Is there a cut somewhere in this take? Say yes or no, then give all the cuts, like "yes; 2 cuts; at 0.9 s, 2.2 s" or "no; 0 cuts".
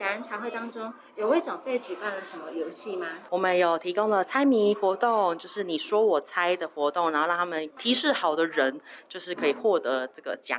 yes; 1 cut; at 3.3 s